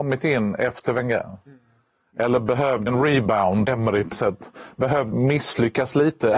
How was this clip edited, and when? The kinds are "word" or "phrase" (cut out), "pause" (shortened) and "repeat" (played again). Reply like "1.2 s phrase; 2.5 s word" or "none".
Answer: 2.9 s word; 3.7 s word; 4.1 s word; 5.1 s word

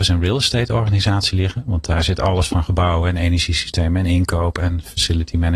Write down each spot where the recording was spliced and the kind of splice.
none

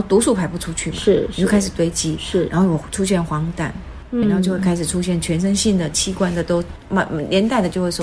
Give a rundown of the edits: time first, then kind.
4.2 s word

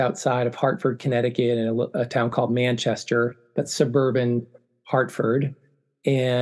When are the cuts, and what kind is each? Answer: none

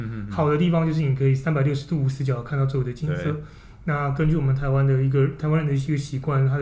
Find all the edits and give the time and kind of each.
none

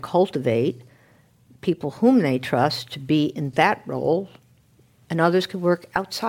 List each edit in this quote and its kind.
none

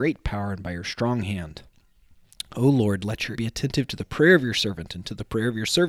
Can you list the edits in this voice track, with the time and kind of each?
3.3 s word

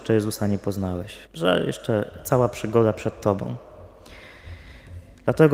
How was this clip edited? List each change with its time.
1.3 s pause

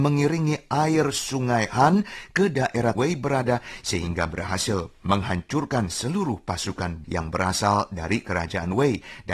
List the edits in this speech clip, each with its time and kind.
3.0 s phrase; 7.0 s word

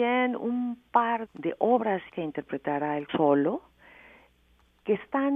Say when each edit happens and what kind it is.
1.3 s word; 2.1 s word; 3.1 s word

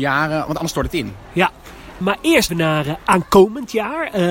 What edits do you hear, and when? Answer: 2.0 s word; 2.5 s word

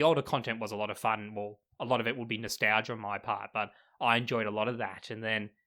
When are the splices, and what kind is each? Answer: none

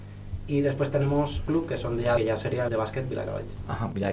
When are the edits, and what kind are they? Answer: 1.5 s word; 2.2 s phrase; 2.7 s phrase

